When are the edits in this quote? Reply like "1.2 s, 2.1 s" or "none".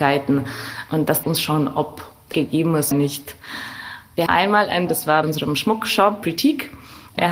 1.2 s, 2.3 s, 2.9 s, 4.3 s, 4.9 s, 5.2 s